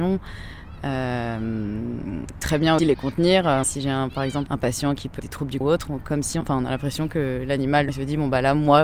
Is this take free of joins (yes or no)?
no